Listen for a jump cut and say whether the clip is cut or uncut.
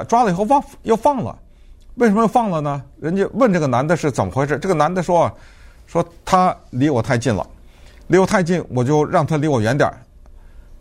uncut